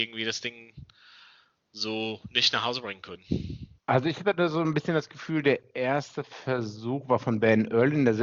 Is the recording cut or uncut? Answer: cut